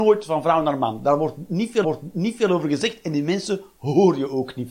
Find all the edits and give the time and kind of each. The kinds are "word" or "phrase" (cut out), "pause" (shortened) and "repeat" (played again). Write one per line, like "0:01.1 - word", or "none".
0:01.8 - repeat